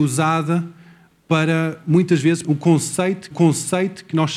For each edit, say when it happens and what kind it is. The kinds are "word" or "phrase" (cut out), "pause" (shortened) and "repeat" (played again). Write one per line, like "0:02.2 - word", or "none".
0:02.4 - word
0:03.3 - repeat